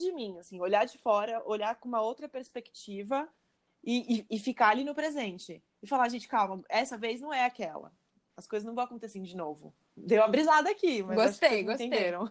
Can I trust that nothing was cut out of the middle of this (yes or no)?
no